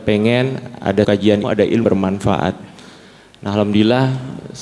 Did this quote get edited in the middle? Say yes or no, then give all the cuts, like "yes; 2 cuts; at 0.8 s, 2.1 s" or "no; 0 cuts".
yes; 3 cuts; at 1.0 s, 1.4 s, 1.8 s